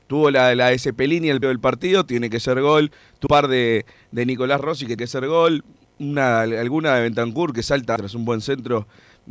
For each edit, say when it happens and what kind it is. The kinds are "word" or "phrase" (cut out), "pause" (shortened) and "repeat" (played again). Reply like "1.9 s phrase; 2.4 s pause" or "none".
1.4 s word; 3.3 s word; 5.0 s word; 8.0 s word